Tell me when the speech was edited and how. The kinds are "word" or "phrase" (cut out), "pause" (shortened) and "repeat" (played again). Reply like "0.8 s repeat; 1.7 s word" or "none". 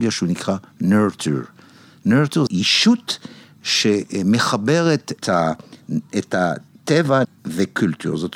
2.5 s word; 5.2 s word; 7.2 s word